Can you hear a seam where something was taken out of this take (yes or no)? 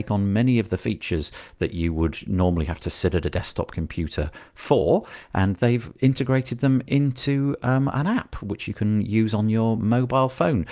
no